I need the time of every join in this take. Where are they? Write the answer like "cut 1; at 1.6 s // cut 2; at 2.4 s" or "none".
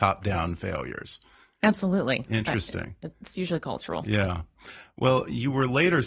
none